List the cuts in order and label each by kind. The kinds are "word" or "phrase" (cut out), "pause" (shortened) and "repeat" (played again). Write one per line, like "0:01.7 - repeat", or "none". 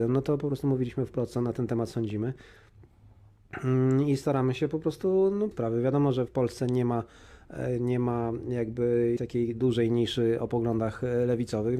0:05.5 - phrase
0:06.3 - word
0:09.2 - word
0:10.4 - word